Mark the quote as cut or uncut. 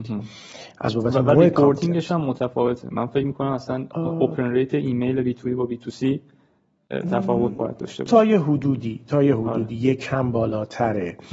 uncut